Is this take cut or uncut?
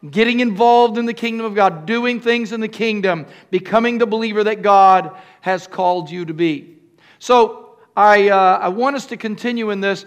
uncut